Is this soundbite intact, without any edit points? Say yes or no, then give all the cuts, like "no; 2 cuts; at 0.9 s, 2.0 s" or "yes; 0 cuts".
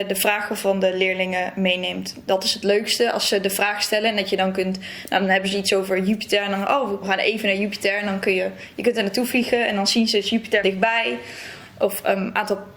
no; 2 cuts; at 7.0 s, 10.6 s